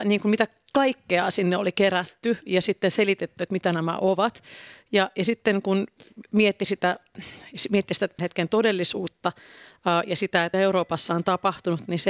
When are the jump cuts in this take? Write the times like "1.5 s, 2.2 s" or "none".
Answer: 8.2 s, 10.5 s